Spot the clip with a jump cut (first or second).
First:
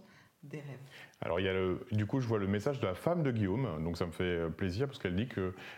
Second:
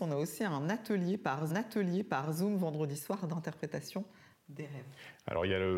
second